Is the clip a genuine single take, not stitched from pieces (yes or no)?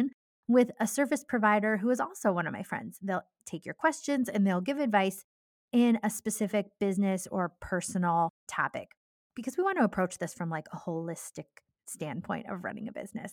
yes